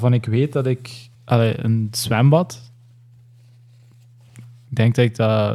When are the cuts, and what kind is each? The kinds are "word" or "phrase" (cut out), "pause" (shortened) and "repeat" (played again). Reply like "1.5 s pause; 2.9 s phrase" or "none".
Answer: 1.1 s pause